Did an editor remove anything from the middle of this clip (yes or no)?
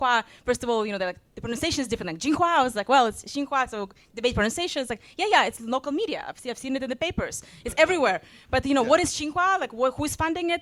no